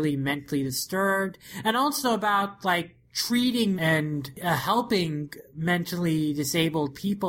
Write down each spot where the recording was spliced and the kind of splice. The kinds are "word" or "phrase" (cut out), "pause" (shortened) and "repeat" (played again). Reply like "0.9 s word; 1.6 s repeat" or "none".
3.8 s phrase